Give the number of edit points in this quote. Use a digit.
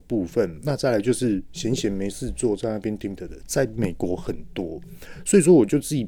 1